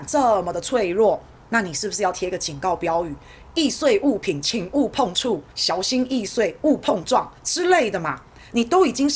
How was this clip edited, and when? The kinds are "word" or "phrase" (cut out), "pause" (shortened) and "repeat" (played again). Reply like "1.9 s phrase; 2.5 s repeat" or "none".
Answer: 5.5 s pause; 7.4 s pause